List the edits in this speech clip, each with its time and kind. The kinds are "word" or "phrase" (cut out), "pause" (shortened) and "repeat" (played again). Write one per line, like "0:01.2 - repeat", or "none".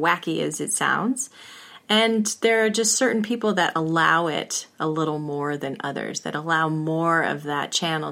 none